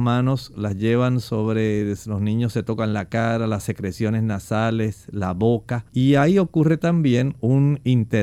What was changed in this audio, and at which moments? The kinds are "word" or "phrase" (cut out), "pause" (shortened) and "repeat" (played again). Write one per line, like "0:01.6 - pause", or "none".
0:05.9 - pause